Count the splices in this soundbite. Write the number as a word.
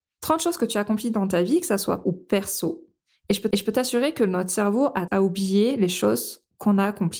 three